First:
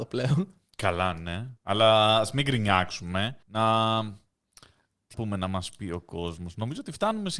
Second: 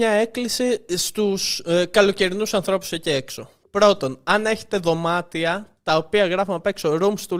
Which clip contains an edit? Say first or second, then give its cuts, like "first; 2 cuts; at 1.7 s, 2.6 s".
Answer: first; 3 cuts; at 1.6 s, 3.4 s, 5.1 s